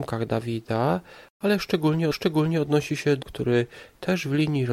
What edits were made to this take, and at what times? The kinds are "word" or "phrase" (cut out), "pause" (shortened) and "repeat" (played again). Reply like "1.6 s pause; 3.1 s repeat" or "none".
2.1 s repeat; 3.2 s word